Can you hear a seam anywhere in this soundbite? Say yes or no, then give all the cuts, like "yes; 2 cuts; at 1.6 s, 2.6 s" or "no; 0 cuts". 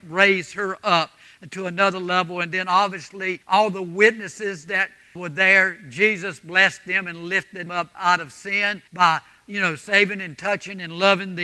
yes; 4 cuts; at 3.4 s, 5.2 s, 7.7 s, 8.9 s